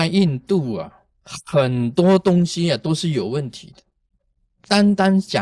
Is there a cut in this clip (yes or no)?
no